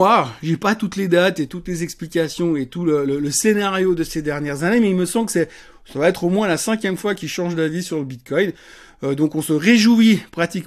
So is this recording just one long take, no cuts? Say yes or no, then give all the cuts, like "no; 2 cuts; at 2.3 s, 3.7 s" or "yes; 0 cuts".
yes; 0 cuts